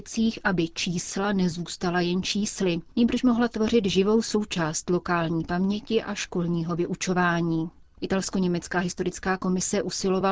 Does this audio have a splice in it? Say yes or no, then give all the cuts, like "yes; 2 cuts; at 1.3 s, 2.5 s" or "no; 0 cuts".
no; 0 cuts